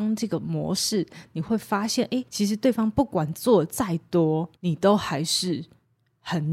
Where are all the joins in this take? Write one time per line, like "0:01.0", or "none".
0:02.2
0:04.5